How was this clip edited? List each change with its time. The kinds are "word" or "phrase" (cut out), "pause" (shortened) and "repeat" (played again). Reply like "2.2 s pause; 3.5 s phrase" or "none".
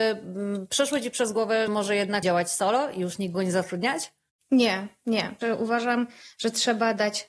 1.7 s word; 2.2 s word; 3.3 s word; 5.4 s word